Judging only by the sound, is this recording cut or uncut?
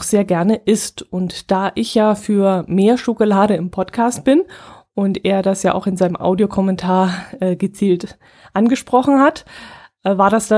uncut